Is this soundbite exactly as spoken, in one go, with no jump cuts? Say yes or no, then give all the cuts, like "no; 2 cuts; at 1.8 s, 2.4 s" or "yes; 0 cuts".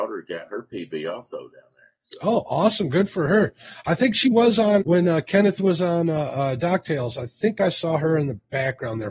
no; 1 cut; at 4.8 s